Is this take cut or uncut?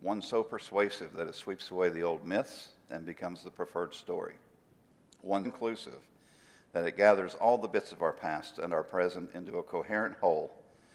cut